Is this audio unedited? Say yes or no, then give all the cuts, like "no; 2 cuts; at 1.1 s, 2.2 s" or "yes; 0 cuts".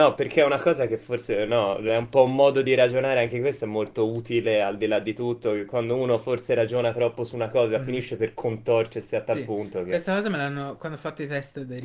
yes; 0 cuts